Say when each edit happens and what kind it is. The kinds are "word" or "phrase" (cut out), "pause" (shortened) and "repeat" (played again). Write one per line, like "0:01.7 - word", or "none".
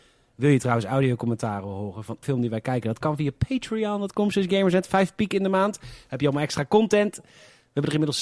0:02.2 - word